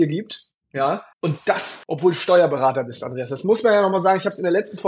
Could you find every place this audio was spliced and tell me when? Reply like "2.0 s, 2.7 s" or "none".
1.1 s, 1.8 s